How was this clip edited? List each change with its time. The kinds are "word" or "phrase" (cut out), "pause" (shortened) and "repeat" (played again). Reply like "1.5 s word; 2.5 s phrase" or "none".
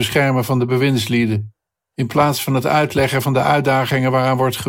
none